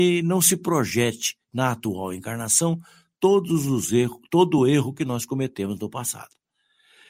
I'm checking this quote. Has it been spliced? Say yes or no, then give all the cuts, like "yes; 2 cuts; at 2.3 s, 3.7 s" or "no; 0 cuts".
no; 0 cuts